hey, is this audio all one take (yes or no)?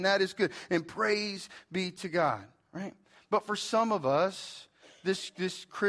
yes